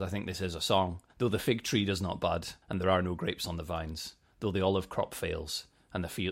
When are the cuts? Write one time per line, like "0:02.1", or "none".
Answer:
0:01.1
0:02.6